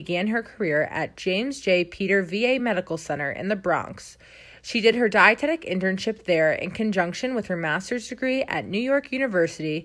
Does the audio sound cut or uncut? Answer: uncut